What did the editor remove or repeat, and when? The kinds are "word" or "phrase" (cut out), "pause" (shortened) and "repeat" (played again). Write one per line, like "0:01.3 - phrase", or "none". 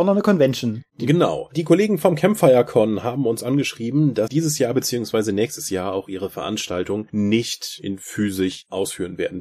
0:04.3 - word